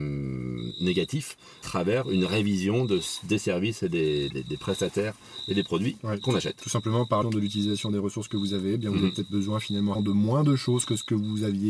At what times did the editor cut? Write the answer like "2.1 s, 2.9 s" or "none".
1.6 s, 4.3 s, 7.2 s, 9.9 s

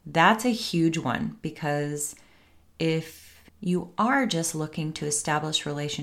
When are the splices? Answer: 3.5 s

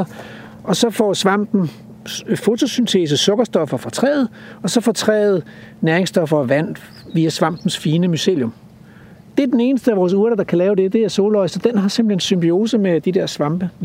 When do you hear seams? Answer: none

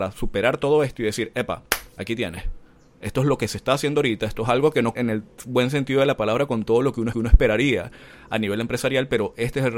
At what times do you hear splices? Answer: 5.0 s, 7.1 s

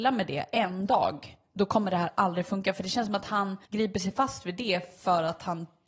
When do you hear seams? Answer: 3.6 s

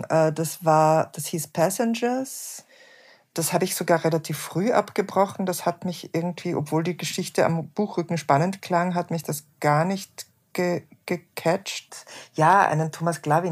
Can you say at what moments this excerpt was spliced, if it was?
none

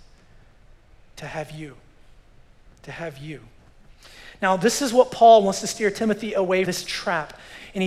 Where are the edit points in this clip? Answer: 6.6 s

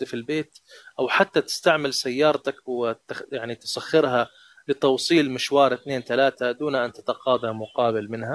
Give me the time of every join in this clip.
none

